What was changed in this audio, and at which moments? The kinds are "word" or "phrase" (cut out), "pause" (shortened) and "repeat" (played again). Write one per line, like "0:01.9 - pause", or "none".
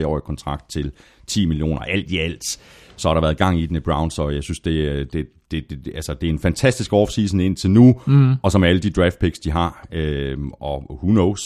none